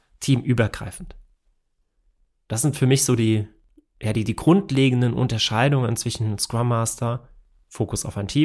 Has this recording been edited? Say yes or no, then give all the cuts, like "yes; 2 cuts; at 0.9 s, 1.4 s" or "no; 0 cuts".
no; 0 cuts